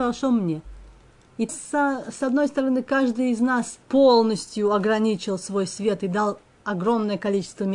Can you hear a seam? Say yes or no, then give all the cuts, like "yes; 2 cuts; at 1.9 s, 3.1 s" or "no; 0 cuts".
yes; 2 cuts; at 1.5 s, 3.8 s